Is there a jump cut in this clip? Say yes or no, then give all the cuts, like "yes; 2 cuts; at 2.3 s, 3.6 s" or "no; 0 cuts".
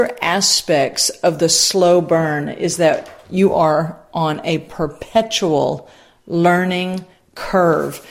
no; 0 cuts